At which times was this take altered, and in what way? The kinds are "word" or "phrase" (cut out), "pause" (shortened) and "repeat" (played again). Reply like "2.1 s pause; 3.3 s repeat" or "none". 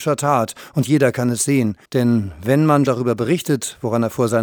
1.8 s pause; 2.9 s word